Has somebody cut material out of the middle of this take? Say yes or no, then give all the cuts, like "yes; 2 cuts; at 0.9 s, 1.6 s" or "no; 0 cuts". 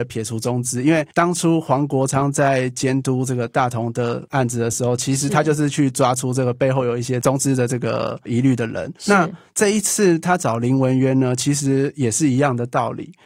yes; 2 cuts; at 1.1 s, 9.0 s